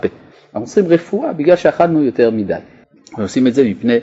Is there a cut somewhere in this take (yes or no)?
no